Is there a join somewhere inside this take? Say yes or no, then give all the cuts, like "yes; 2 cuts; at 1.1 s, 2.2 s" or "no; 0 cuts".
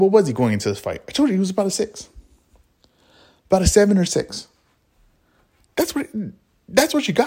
no; 0 cuts